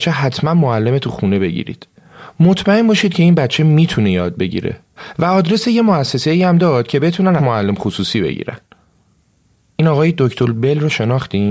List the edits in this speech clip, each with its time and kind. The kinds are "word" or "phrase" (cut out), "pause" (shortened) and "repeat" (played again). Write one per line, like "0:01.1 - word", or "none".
0:07.4 - word